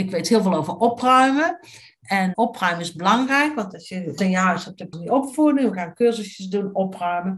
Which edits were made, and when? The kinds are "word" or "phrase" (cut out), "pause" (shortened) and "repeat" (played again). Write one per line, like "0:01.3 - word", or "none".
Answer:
0:02.3 - word
0:04.2 - word
0:04.9 - phrase